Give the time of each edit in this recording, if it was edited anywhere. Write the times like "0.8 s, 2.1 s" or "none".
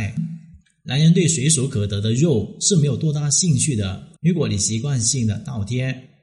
4.2 s

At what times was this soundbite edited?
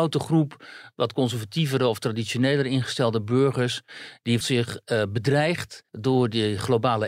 4.4 s, 5.9 s

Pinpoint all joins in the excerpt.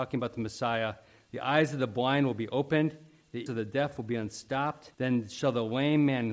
3.5 s, 4.9 s

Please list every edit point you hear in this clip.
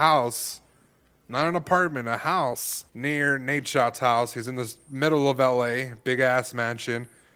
2.9 s

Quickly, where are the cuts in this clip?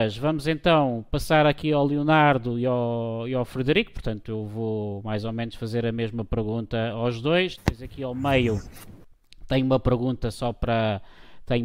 none

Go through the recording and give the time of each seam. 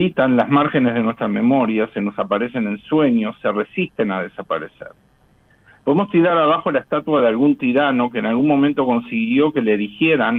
none

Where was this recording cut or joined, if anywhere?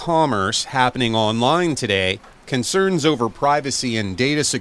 none

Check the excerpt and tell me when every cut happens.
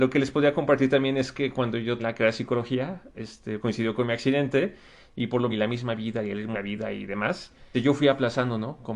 2.0 s, 3.6 s, 5.5 s, 6.5 s, 7.7 s

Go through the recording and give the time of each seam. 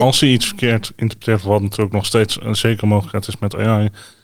none

